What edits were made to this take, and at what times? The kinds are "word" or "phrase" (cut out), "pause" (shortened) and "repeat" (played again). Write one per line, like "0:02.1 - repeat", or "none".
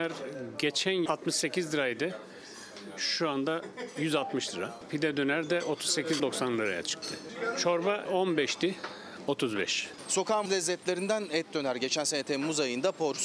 0:01.1 - word
0:06.2 - word
0:08.1 - word
0:10.5 - word